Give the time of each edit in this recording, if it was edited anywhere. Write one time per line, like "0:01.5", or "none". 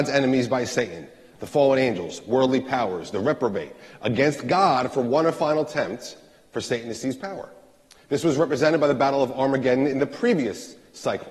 none

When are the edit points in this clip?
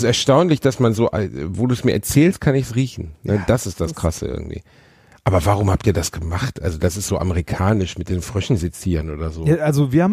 none

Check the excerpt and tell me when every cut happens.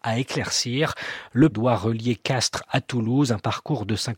0:01.5

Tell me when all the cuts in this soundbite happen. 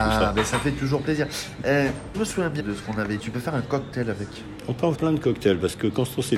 0:02.1
0:02.6
0:03.2
0:04.9

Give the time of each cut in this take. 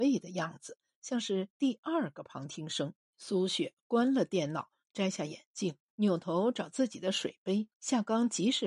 0:03.0
0:05.9
0:07.8

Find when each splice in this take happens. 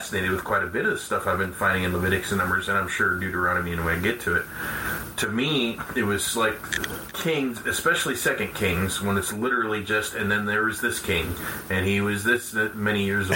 none

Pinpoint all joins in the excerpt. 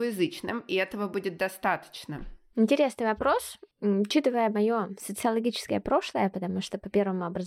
0:03.7

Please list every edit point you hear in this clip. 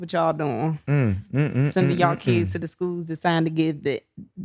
none

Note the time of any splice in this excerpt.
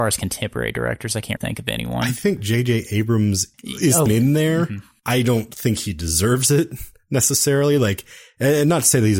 0:01.4
0:03.5
0:04.1

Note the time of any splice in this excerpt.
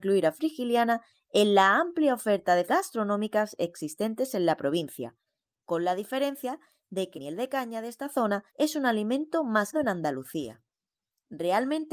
0:02.7
0:07.1
0:08.5
0:09.7

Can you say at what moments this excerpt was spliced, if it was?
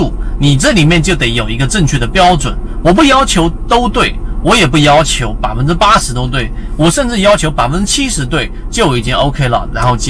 none

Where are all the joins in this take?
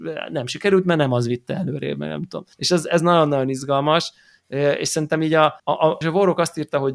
0:02.5
0:05.6
0:06.0

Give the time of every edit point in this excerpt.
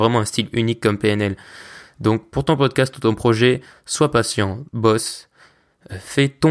0:04.7

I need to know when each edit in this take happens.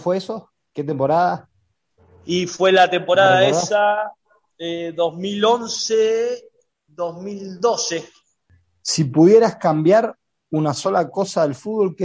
none

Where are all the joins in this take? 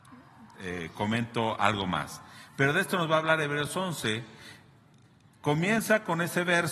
none

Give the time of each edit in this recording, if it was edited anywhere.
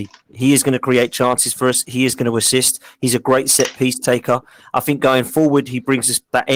none

